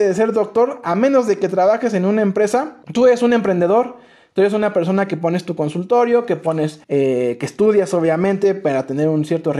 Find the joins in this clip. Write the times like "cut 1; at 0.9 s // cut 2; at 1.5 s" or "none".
cut 1; at 2.8 s // cut 2; at 6.8 s